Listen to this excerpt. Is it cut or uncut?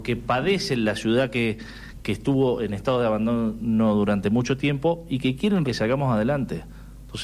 cut